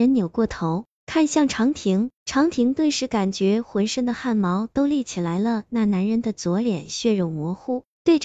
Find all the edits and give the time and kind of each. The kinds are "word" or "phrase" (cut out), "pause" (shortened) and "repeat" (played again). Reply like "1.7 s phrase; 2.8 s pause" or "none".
2.2 s pause